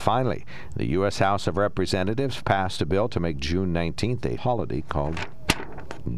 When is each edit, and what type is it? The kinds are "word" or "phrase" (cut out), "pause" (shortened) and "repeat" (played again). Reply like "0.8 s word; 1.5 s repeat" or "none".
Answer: 4.4 s word